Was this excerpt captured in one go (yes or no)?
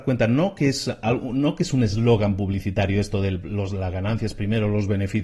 yes